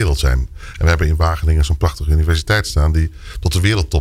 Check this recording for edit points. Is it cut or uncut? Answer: uncut